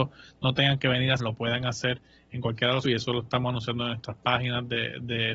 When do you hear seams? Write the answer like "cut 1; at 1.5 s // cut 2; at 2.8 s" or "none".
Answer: cut 1; at 1.2 s // cut 2; at 2.8 s